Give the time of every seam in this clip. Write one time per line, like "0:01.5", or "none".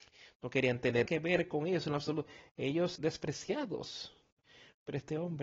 0:01.1
0:03.0